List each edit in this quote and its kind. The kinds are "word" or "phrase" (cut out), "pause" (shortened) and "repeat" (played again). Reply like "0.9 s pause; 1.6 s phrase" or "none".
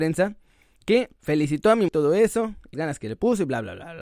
1.2 s pause; 1.9 s phrase; 2.7 s word